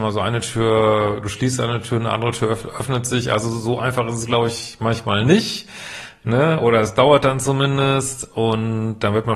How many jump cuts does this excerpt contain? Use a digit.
0